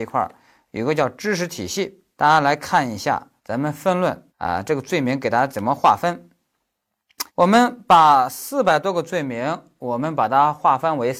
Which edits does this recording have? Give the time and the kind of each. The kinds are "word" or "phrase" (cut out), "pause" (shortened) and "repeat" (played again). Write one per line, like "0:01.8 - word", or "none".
0:02.1 - pause
0:03.4 - pause
0:04.3 - pause
0:07.3 - pause